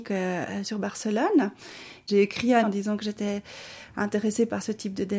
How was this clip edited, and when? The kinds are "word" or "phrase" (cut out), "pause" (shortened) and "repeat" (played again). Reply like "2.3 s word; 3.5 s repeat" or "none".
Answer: 2.6 s word